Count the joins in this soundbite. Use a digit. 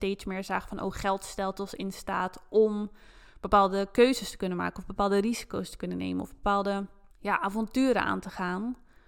1